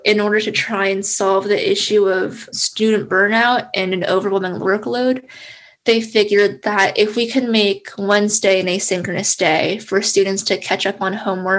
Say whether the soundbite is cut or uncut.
cut